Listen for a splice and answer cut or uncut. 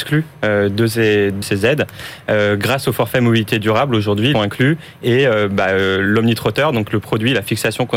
cut